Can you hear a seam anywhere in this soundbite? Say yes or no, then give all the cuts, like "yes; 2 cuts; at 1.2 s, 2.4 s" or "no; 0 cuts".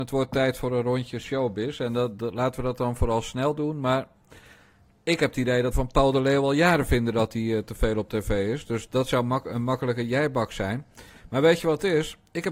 yes; 1 cut; at 5.7 s